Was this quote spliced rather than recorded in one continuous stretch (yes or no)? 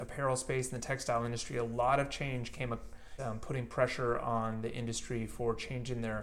yes